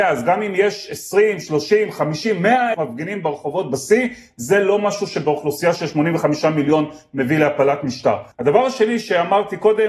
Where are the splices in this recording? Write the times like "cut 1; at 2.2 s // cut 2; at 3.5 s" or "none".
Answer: cut 1; at 2.7 s // cut 2; at 8.3 s